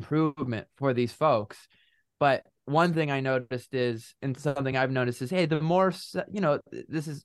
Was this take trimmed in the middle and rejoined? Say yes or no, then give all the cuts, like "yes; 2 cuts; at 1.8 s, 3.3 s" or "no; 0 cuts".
no; 0 cuts